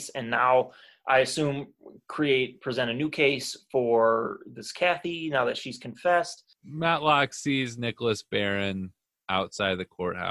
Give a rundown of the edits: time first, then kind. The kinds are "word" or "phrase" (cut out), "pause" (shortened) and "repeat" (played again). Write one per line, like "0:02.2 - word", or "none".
none